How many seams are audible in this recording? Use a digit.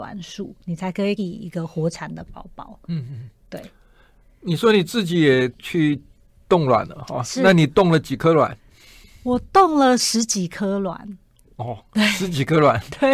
1